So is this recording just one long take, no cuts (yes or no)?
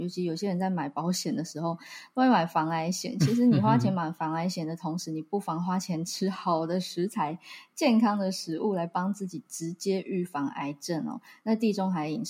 yes